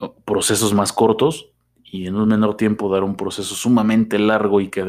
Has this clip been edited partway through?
no; 0 cuts

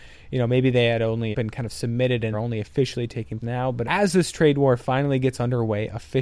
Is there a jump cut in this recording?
yes; 4 cuts; at 1.3 s, 2.3 s, 3.4 s, 3.8 s

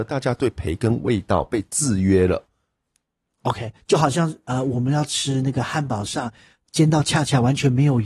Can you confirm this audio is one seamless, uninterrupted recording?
yes; 0 cuts

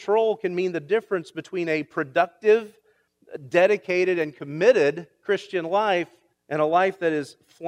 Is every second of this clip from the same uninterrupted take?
no; 1 cut; at 6.3 s

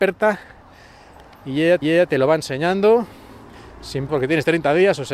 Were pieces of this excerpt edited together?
yes; 2 cuts; at 1.8 s, 4.1 s

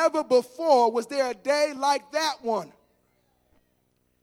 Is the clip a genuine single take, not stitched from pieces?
yes; 0 cuts

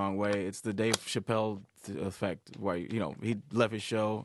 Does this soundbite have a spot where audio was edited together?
no; 0 cuts

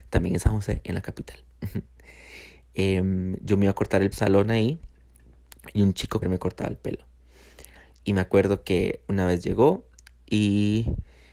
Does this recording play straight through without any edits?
no; 2 cuts; at 4.1 s, 6.2 s

